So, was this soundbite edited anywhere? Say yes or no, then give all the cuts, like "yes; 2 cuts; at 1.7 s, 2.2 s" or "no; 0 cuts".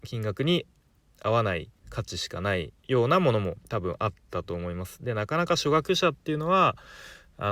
yes; 3 cuts; at 1.8 s, 2.8 s, 3.6 s